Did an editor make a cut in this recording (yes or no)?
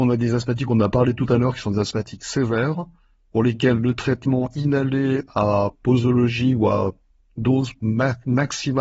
no